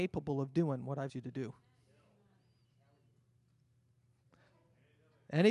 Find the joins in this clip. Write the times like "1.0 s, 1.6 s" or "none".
1.1 s